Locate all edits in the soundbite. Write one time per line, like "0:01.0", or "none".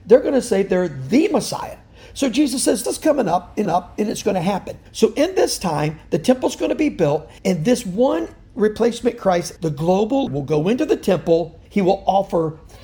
0:02.8
0:03.7
0:04.9
0:07.4
0:09.6
0:10.3
0:11.6